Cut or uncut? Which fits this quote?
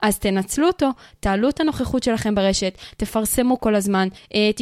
uncut